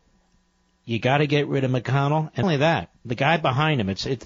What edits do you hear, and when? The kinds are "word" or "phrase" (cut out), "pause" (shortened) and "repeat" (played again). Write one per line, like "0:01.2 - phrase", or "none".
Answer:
0:02.4 - word
0:03.0 - pause